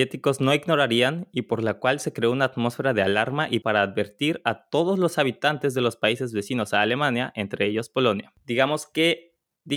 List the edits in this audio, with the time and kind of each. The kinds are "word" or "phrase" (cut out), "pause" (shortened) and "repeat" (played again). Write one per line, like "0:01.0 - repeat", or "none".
0:03.6 - word